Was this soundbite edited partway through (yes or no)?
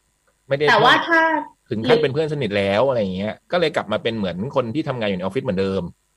yes